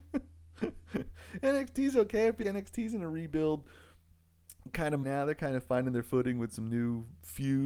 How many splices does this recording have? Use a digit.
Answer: 2